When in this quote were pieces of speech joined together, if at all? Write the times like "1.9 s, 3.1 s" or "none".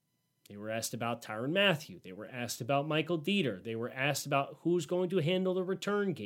none